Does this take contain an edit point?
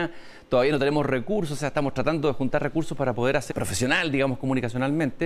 yes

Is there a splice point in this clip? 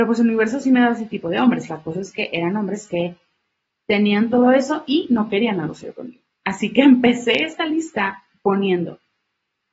no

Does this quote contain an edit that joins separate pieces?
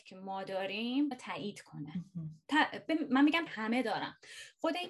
yes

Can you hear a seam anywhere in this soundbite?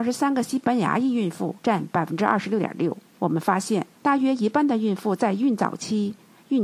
yes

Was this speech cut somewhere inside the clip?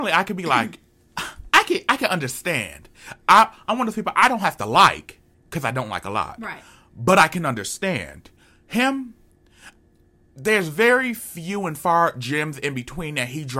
no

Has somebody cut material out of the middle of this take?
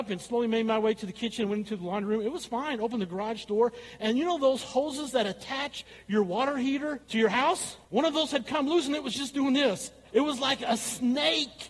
yes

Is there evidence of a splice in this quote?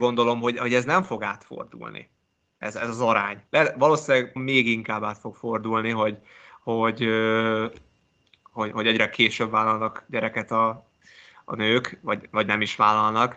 yes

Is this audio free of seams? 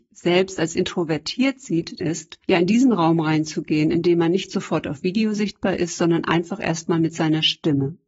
no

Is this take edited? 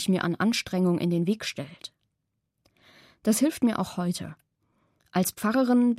no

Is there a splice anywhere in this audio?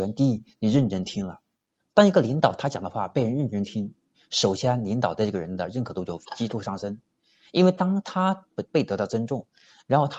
no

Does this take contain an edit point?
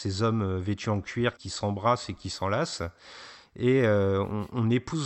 yes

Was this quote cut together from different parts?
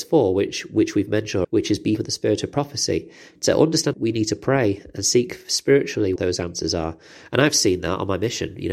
yes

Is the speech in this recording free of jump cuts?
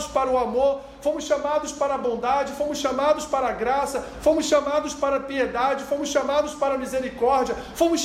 yes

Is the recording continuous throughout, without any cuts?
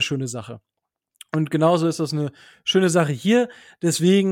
yes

